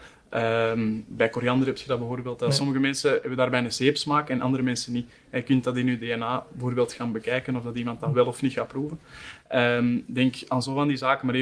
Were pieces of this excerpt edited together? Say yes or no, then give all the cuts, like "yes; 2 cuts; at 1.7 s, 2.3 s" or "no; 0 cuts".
no; 0 cuts